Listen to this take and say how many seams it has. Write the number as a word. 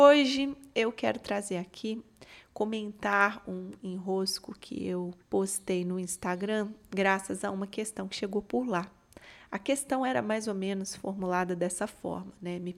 one